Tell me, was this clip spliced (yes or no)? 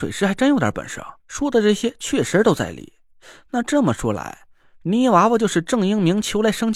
yes